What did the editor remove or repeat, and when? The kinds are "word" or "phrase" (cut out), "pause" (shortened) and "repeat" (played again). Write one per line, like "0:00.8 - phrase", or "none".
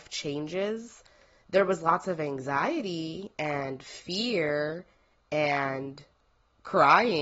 none